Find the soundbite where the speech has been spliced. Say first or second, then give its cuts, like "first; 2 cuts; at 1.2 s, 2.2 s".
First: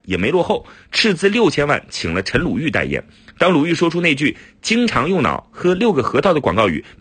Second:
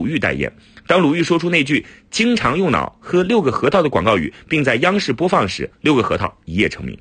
second; 1 cut; at 5.7 s